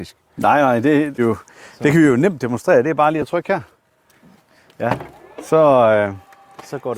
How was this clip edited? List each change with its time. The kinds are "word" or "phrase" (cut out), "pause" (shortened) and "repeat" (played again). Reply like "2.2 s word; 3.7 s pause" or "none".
1.2 s phrase